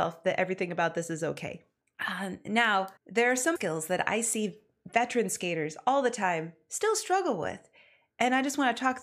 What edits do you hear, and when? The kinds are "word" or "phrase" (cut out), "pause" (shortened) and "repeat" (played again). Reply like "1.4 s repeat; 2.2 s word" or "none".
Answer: 1.8 s pause; 3.0 s pause; 3.6 s phrase